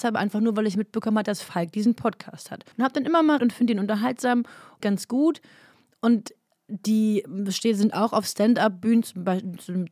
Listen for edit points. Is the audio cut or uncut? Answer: cut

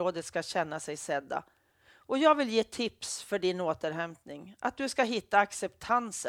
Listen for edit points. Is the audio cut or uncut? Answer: uncut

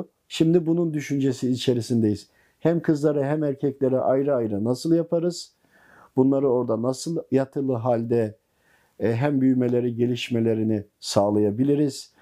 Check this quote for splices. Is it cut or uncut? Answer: uncut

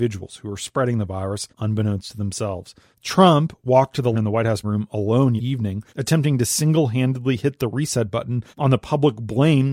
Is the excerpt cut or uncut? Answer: cut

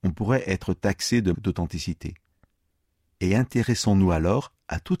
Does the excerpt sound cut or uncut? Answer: cut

